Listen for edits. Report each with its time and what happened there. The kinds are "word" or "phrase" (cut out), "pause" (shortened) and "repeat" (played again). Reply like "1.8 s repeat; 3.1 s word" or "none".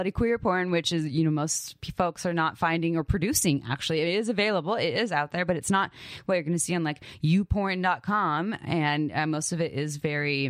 none